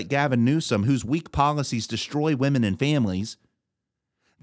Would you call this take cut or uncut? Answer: uncut